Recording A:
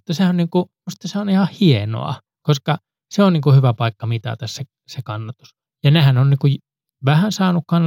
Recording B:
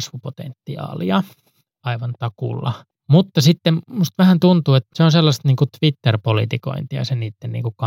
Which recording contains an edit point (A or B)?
B